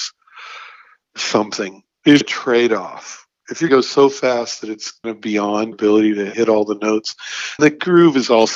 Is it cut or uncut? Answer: cut